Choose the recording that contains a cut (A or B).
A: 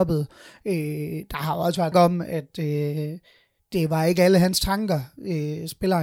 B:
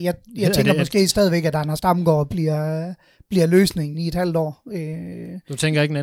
A